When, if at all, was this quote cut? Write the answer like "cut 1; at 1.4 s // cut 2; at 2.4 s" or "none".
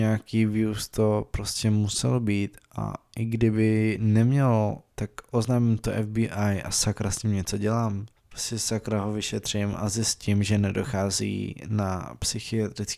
cut 1; at 8.2 s